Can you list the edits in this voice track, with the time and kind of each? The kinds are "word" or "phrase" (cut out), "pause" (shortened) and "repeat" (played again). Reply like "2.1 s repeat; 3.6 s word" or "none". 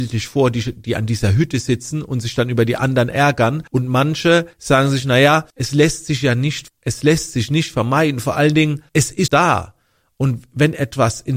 3.7 s pause; 4.5 s pause; 5.5 s pause; 6.7 s word; 8.9 s pause; 9.3 s word